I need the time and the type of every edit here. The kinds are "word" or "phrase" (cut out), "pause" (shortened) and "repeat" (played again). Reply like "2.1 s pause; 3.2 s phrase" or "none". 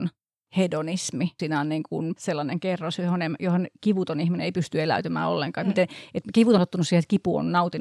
1.4 s word; 2.2 s word; 6.6 s word